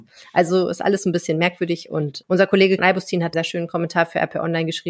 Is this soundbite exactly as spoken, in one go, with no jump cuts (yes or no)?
no